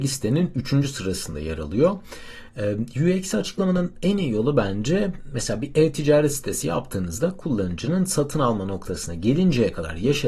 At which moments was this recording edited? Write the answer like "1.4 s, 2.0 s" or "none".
none